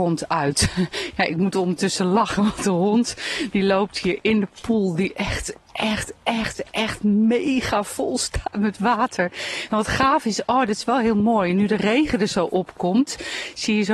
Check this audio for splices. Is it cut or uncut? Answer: uncut